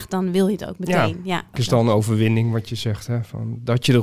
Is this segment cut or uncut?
cut